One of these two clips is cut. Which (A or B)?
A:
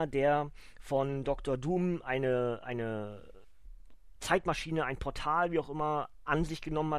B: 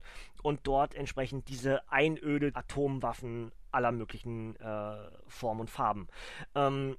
B